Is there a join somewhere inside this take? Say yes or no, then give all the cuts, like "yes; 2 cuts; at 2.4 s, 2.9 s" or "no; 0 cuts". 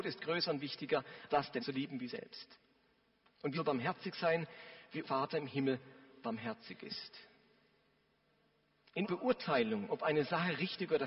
yes; 6 cuts; at 1.3 s, 1.6 s, 2.1 s, 3.5 s, 5.0 s, 9.0 s